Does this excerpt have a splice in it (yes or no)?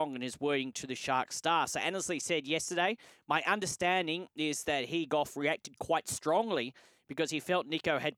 no